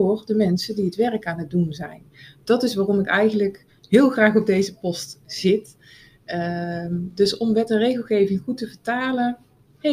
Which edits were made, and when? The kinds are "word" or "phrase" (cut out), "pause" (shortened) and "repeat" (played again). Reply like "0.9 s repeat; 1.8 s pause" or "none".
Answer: none